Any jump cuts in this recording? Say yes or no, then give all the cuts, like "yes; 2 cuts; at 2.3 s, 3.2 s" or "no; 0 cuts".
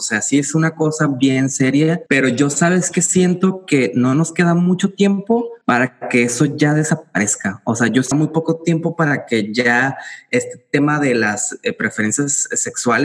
yes; 3 cuts; at 2.1 s, 5.6 s, 8.1 s